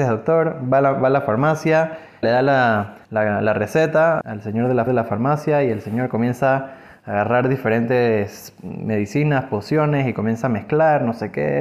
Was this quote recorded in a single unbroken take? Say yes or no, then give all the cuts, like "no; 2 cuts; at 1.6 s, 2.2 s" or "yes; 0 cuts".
no; 4 cuts; at 2.2 s, 3.0 s, 4.2 s, 4.9 s